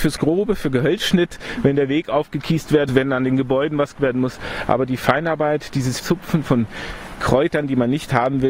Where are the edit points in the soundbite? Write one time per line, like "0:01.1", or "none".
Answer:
0:02.9
0:04.0
0:06.0